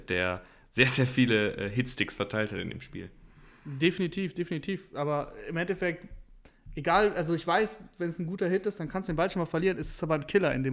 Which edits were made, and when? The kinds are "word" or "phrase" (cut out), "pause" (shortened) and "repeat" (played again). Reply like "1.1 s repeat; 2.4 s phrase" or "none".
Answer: none